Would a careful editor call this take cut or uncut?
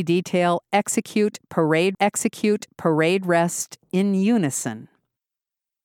cut